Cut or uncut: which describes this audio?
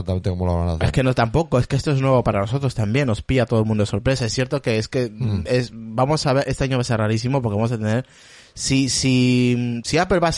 uncut